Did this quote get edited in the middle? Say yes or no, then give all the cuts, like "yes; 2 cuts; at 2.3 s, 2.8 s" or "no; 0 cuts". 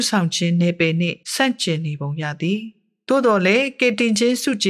yes; 1 cut; at 1.2 s